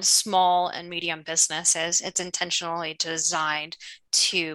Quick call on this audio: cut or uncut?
uncut